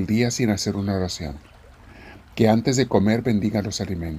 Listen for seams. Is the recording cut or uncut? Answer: uncut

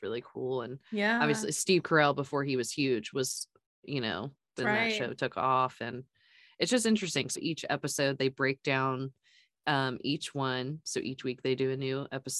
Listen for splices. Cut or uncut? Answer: cut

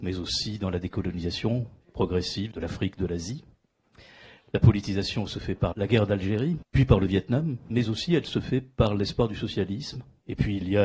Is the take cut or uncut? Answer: cut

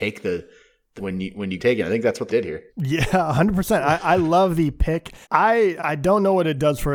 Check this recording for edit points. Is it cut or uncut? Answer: cut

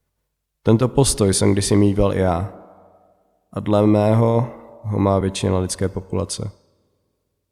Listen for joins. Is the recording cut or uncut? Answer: uncut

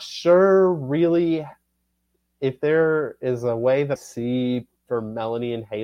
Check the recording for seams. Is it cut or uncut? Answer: cut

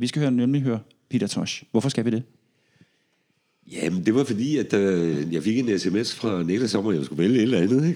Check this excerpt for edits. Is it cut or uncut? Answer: uncut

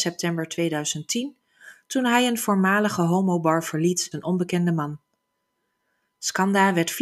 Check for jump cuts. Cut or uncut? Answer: cut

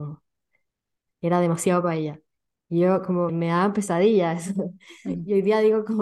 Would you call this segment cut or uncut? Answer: cut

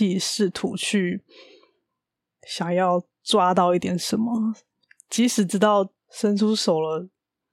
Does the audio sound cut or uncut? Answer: cut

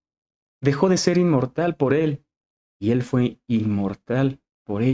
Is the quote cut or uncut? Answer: uncut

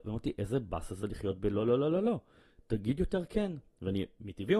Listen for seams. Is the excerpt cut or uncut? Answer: uncut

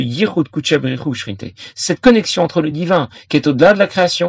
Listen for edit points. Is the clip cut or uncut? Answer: uncut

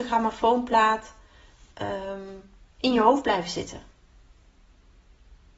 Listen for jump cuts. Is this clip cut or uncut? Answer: uncut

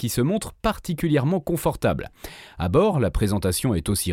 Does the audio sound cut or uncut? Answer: uncut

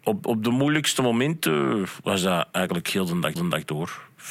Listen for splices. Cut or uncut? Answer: cut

